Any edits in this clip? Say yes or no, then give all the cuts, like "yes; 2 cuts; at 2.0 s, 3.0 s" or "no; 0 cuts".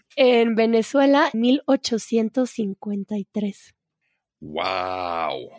yes; 1 cut; at 1.3 s